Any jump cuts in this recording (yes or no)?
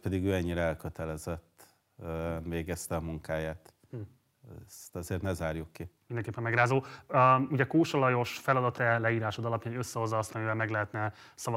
yes